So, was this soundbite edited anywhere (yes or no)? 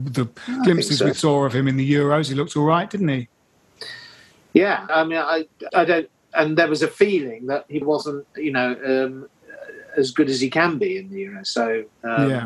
yes